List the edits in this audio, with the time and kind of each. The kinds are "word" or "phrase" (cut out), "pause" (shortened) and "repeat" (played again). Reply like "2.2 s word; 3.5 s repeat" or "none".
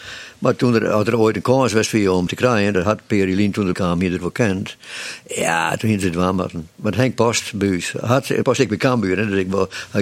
2.3 s word; 3.7 s phrase; 8.4 s word